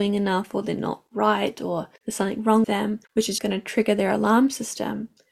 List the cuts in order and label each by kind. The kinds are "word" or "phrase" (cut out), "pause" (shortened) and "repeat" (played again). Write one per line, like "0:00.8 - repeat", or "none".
0:01.9 - pause
0:02.6 - word
0:03.0 - pause
0:03.4 - word